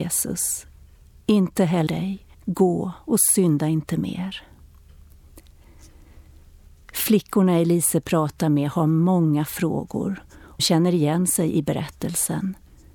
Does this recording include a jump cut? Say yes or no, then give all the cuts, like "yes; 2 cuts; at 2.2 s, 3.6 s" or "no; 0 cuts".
yes; 3 cuts; at 1.9 s, 2.3 s, 10.6 s